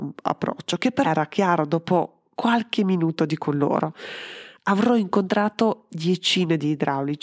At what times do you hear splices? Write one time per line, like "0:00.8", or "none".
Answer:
0:01.0
0:03.4